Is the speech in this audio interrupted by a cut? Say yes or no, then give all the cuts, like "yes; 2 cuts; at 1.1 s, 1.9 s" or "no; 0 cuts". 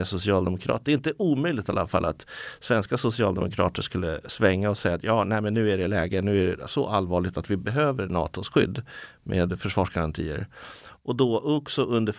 no; 0 cuts